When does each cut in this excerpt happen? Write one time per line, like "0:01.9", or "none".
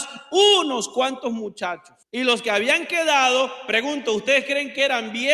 0:02.0

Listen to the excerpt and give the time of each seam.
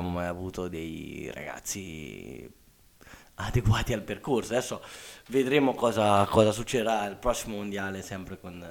none

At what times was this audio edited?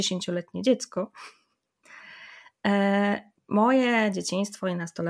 0:03.3

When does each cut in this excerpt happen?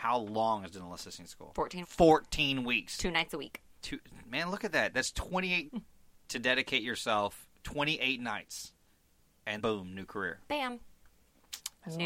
0:01.8
0:03.7
0:05.7
0:09.6

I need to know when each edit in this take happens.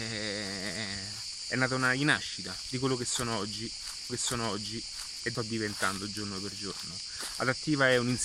0:04.1
0:05.3

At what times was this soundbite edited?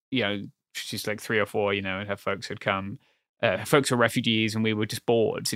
none

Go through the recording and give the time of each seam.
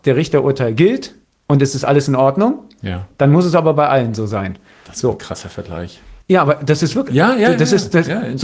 0:01.2
0:06.2

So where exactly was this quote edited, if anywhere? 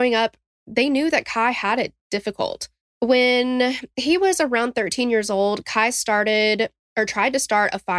0:02.8

